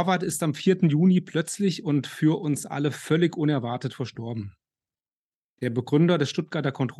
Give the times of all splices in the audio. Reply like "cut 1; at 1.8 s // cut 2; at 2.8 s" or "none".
none